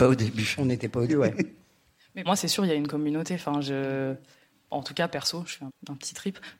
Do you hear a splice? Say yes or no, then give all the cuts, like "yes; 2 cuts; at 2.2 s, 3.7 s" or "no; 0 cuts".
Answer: yes; 3 cuts; at 1.1 s, 2.3 s, 5.7 s